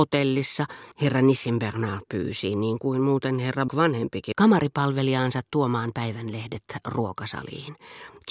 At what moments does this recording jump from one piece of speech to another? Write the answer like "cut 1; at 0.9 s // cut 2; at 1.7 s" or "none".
cut 1; at 0.9 s // cut 2; at 3.7 s // cut 3; at 4.3 s

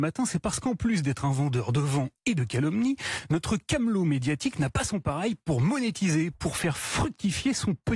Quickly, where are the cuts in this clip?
none

